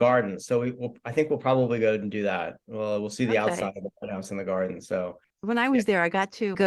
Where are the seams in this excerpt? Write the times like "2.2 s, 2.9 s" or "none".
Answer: none